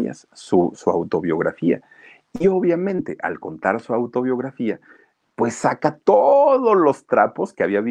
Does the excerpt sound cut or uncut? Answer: uncut